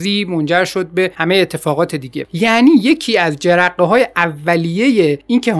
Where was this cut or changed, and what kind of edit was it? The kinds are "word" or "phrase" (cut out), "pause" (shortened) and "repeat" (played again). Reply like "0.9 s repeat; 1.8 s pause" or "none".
none